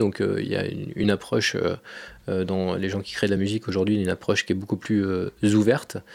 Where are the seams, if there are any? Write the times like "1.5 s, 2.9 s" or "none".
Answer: none